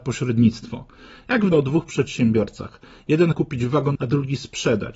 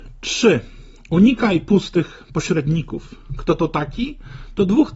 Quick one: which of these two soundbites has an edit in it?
first; 3 cuts; at 1.5 s, 3.3 s, 4.0 s

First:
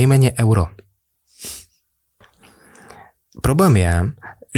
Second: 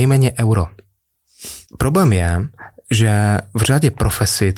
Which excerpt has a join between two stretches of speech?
second; 1 cut; at 1.7 s

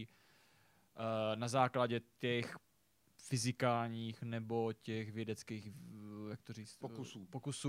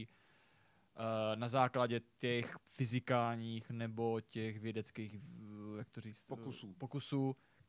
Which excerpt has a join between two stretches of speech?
second; 1 cut; at 2.6 s

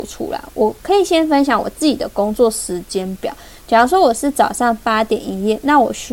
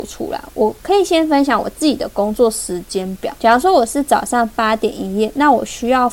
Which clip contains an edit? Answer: second; 1 cut; at 3.4 s

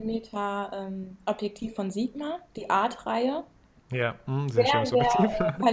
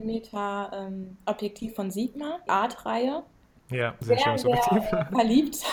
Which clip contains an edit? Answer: second; 2 cuts; at 2.5 s, 4.0 s

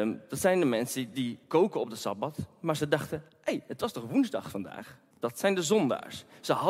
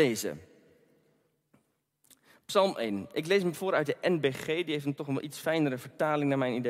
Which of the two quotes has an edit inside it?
first; 3 cuts; at 1.4 s, 3.3 s, 5.1 s

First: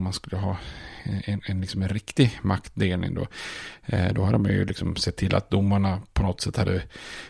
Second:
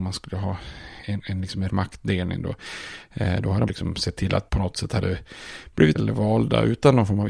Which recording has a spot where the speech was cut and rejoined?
second; 5 cuts; at 1.0 s, 1.7 s, 3.7 s, 4.5 s, 6.0 s

